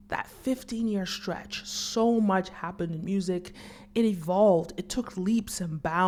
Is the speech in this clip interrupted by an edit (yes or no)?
no